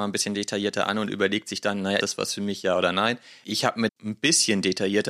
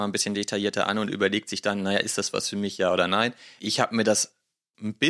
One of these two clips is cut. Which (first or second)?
first